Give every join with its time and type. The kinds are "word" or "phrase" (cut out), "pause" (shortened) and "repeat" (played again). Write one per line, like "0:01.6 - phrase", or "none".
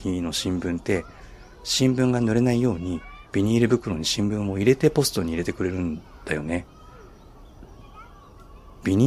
0:03.3 - pause